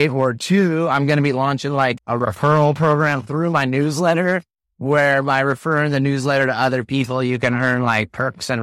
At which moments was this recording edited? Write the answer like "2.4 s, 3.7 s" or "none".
2.0 s